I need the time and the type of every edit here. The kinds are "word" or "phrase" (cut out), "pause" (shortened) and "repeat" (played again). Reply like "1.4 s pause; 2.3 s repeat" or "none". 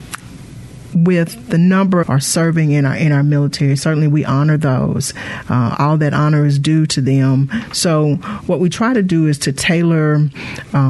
2.0 s phrase